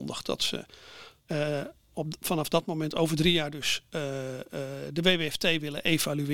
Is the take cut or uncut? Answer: cut